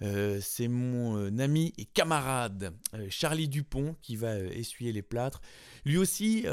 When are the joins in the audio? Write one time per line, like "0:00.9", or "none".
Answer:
none